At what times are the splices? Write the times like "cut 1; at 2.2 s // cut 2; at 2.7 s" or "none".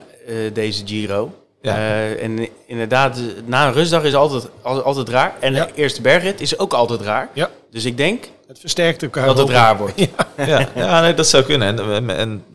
none